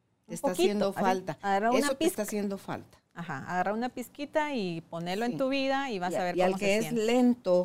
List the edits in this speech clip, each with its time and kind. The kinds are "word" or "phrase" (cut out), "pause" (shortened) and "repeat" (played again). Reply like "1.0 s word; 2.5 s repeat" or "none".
3.1 s pause